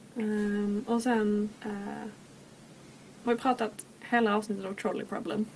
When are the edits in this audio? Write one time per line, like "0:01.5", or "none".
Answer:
0:01.6
0:03.3

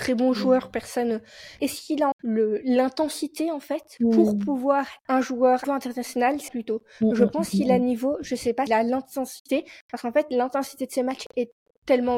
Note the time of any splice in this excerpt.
0:01.6
0:02.1
0:05.0
0:05.6
0:06.5
0:08.7

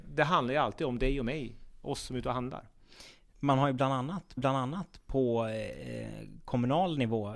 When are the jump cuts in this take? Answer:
0:04.4

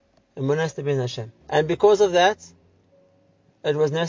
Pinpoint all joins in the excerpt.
0:01.4

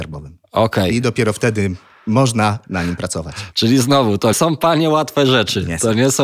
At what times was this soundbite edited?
0:02.6
0:04.3

